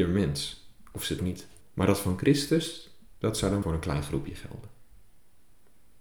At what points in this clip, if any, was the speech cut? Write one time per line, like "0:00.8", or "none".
0:01.2
0:01.6
0:03.6